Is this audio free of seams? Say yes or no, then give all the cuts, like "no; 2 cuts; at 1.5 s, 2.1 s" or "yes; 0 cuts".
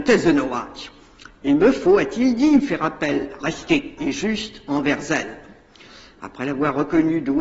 no; 2 cuts; at 3.4 s, 4.0 s